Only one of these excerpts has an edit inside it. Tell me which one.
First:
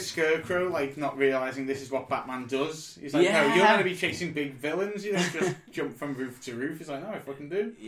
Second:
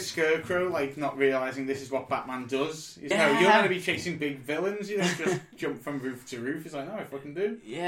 second; 1 cut; at 3.1 s

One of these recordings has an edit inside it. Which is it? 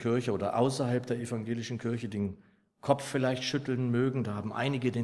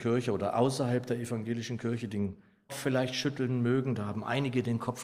second; 1 cut; at 2.7 s

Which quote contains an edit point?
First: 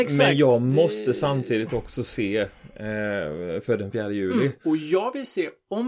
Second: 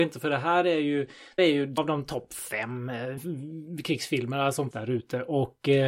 second; 4 cuts; at 1.4 s, 1.8 s, 3.2 s, 4.7 s

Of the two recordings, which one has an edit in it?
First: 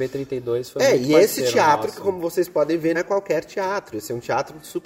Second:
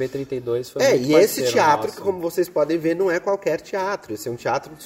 first; 1 cut; at 2.9 s

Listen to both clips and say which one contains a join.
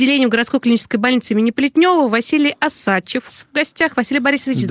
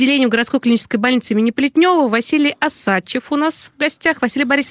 first; 1 cut; at 3.3 s

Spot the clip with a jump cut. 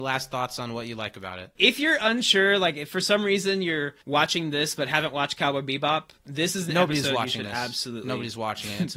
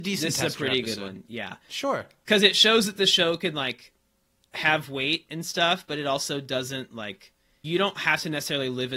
first; 1 cut; at 4.0 s

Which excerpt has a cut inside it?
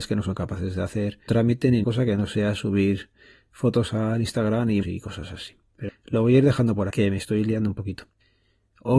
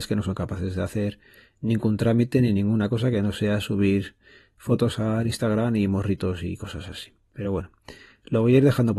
first; 5 cuts; at 1.3 s, 1.8 s, 4.8 s, 5.9 s, 6.9 s

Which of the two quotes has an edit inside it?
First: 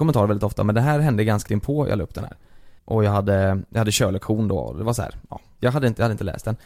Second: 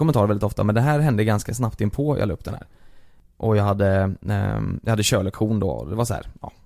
first; 3 cuts; at 1.5 s, 2.8 s, 3.7 s

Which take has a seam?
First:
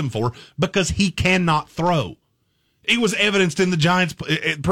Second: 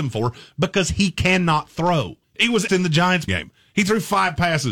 second; 3 cuts; at 2.2 s, 2.7 s, 3.3 s

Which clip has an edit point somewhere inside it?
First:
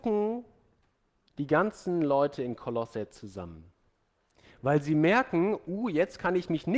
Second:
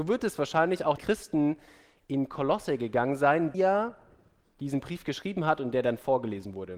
second; 3 cuts; at 1.0 s, 3.5 s, 4.4 s

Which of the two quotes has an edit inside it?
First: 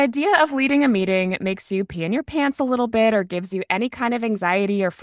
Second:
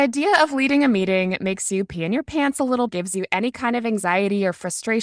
second; 1 cut; at 2.9 s

